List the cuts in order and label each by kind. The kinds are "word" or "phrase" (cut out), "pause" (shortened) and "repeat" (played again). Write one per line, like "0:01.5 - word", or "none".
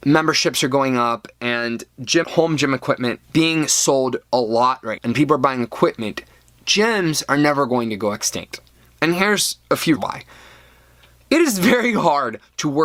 0:02.2 - word
0:03.2 - word
0:05.0 - word
0:10.0 - word